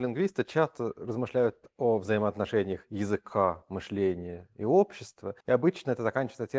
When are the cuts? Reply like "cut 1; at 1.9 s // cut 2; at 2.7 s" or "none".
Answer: cut 1; at 5.4 s

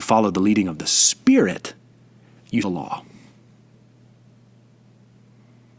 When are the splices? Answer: cut 1; at 2.6 s

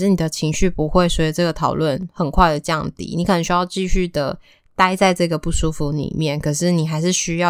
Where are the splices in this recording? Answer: none

